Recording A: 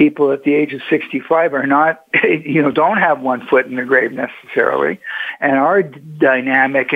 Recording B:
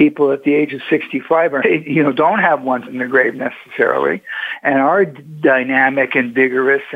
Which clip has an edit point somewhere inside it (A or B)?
B